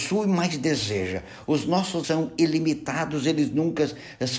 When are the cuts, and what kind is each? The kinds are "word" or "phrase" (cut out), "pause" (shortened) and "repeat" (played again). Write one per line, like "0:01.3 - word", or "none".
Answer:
0:02.0 - word